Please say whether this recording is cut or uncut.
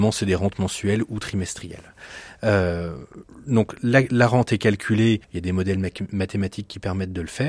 cut